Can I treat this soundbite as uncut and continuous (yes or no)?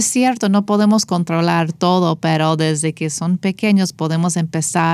yes